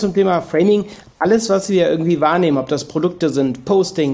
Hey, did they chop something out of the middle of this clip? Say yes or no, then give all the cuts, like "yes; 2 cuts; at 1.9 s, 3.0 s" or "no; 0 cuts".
no; 0 cuts